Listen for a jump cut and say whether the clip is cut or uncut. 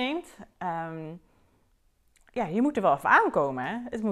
uncut